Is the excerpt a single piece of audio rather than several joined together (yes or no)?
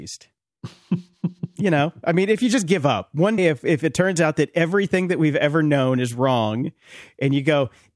no